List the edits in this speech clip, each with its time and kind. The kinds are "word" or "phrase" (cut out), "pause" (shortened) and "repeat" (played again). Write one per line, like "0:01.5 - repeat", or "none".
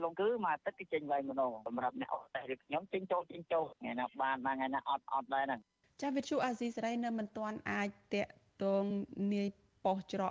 0:05.8 - pause